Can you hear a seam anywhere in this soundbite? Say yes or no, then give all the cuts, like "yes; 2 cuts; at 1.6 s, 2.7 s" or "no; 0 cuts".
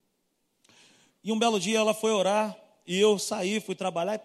no; 0 cuts